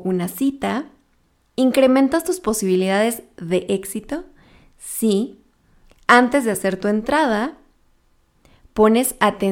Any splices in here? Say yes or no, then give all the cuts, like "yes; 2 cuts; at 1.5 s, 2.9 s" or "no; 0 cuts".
no; 0 cuts